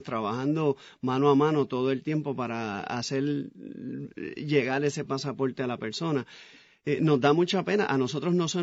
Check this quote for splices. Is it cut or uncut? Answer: uncut